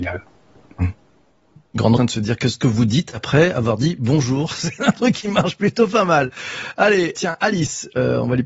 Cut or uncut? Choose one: cut